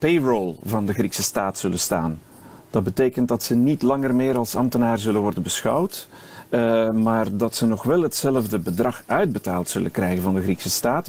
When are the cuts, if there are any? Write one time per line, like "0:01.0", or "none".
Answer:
none